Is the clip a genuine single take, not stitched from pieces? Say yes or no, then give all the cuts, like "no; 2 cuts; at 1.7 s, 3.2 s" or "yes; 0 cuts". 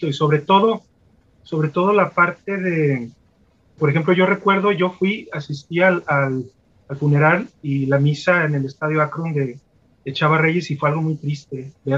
no; 1 cut; at 3.8 s